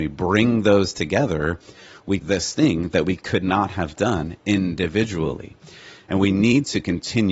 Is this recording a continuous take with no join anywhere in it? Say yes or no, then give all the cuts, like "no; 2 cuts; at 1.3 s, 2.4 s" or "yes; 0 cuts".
no; 1 cut; at 2.2 s